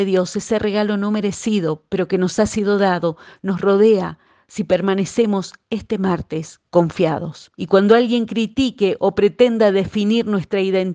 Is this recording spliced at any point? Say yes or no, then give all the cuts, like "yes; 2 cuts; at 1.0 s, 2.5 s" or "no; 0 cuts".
yes; 2 cuts; at 4.2 s, 7.5 s